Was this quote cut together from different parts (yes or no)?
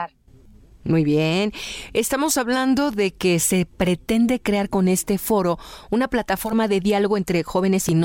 no